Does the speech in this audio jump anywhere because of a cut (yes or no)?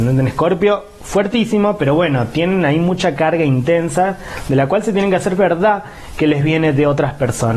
yes